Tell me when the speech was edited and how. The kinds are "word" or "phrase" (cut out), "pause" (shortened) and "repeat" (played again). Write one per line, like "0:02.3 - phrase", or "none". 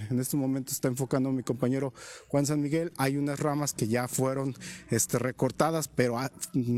none

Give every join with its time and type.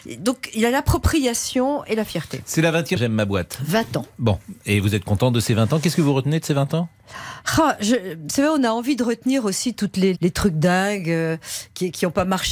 0:03.0 - phrase
0:10.1 - word

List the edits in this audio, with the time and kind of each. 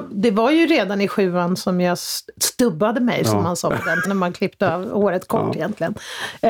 0:04.0 - word

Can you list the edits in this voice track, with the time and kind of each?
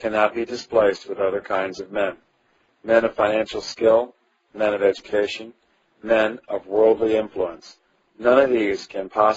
none

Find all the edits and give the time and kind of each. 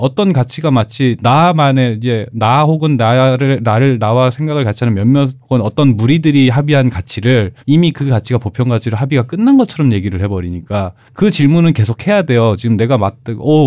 0:07.6 - pause

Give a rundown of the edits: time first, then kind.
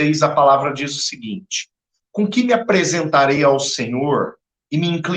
none

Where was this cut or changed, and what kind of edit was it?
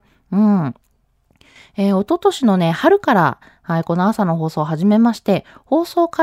none

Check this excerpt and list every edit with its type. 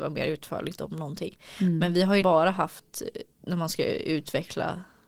0:02.2 - word

